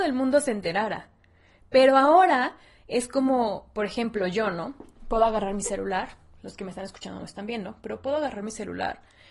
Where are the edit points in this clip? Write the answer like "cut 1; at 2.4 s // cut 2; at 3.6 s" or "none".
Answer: none